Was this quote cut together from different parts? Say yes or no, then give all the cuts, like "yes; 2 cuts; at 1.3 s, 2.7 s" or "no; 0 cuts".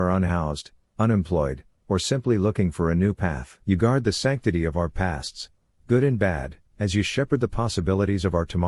yes; 2 cuts; at 3.6 s, 6.7 s